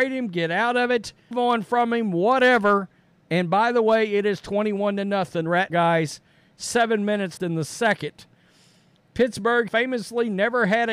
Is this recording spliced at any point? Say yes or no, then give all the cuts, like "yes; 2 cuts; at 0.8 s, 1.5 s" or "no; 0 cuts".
yes; 4 cuts; at 1.3 s, 5.7 s, 7.4 s, 9.7 s